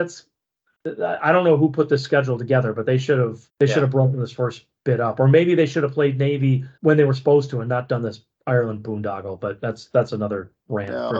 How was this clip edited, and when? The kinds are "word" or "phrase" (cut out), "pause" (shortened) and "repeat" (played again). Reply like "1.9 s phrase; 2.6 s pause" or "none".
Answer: 3.5 s pause; 6.8 s pause

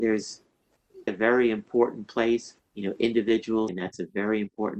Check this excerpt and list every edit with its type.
1.1 s word; 2.6 s word; 3.7 s word

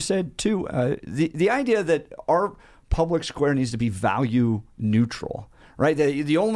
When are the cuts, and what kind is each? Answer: none

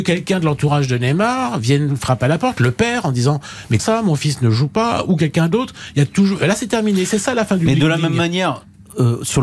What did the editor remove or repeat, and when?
3.8 s word

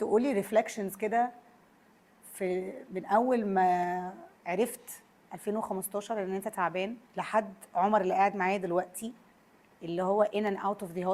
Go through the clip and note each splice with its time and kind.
4.4 s pause; 7.0 s pause

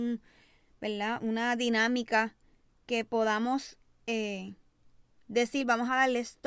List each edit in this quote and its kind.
none

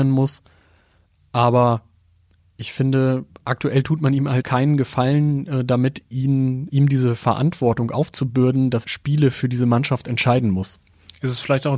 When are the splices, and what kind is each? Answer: 4.4 s word; 6.7 s word; 8.8 s word

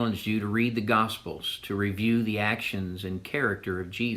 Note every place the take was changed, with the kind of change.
none

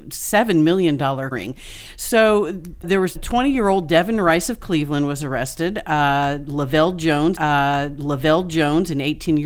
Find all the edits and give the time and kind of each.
1.3 s word; 2.8 s word; 3.2 s word; 7.4 s repeat

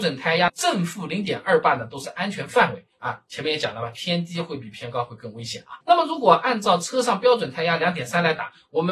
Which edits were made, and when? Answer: 5.8 s pause

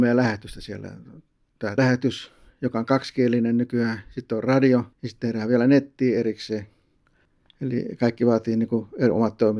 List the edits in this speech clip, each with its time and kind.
1.8 s phrase; 4.9 s pause

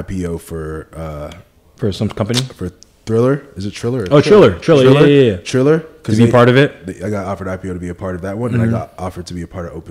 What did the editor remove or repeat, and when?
7.0 s phrase

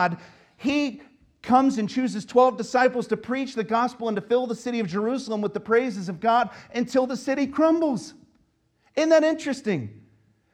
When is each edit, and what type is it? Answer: none

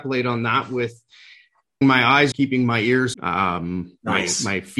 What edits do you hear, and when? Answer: 1.8 s word; 2.3 s word; 3.1 s word

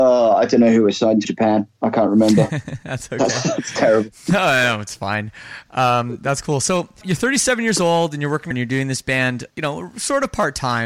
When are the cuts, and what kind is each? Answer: 1.2 s word; 7.0 s word; 8.5 s phrase; 9.5 s pause

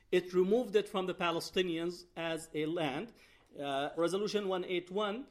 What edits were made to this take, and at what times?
4.0 s word

